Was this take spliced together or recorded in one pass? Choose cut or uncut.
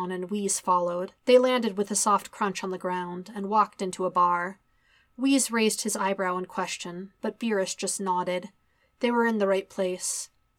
cut